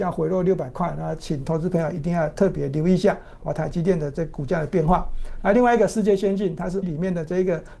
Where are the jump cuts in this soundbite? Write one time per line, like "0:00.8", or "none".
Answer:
0:06.8